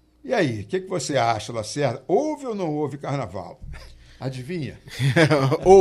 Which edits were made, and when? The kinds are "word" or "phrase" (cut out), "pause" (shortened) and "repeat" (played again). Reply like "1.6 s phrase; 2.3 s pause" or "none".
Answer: none